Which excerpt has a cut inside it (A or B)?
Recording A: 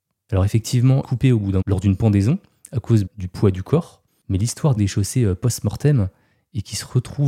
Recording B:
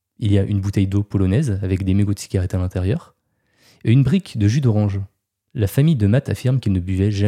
A